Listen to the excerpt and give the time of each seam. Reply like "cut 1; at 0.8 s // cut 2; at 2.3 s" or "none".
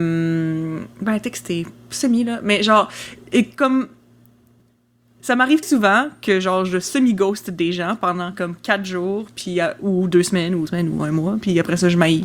cut 1; at 0.9 s // cut 2; at 5.6 s // cut 3; at 10.7 s